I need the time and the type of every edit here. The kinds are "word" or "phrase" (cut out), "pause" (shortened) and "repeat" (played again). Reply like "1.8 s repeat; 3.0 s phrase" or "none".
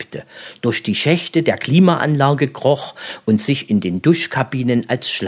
none